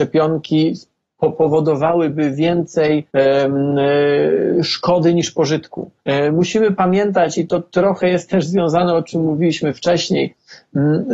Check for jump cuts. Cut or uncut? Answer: cut